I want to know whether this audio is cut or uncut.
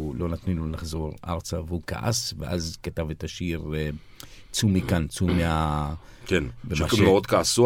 uncut